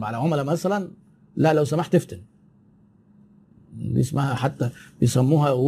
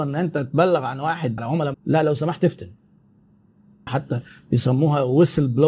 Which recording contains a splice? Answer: second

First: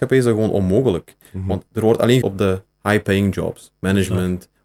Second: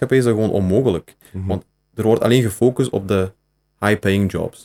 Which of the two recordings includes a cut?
first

